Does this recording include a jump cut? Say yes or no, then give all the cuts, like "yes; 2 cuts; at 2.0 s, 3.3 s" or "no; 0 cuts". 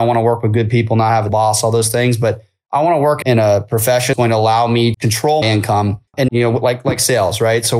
yes; 6 cuts; at 1.3 s, 3.2 s, 4.1 s, 4.9 s, 5.4 s, 6.3 s